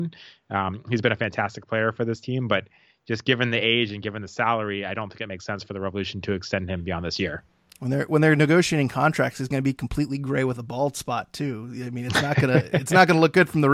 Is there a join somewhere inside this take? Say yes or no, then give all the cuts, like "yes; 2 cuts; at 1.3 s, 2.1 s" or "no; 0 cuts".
no; 0 cuts